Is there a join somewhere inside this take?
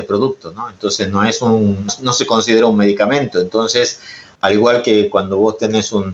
yes; 1 cut; at 1.9 s

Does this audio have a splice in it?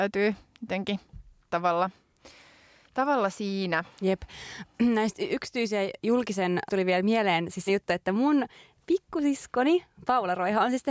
yes; 3 cuts; at 1.5 s, 6.7 s, 7.7 s

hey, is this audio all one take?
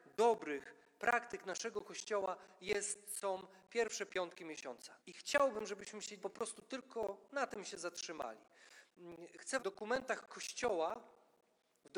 no; 3 cuts; at 5.0 s, 6.2 s, 9.6 s

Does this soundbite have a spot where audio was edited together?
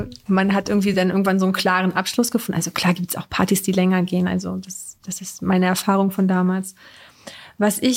no; 0 cuts

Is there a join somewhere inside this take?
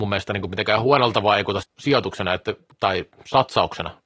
yes; 2 cuts; at 1.6 s, 2.7 s

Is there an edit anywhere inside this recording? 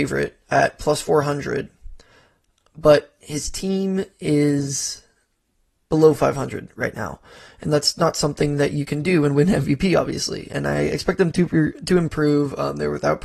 no; 0 cuts

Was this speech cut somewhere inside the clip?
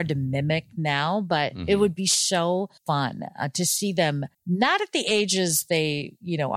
yes; 2 cuts; at 2.8 s, 4.3 s

